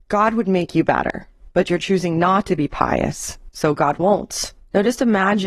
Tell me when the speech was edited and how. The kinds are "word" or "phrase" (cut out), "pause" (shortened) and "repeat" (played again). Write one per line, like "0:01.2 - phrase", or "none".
none